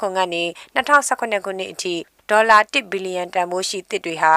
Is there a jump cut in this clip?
no; 0 cuts

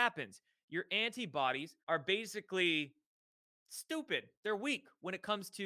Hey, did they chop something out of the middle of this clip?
yes; 2 cuts; at 1.8 s, 4.4 s

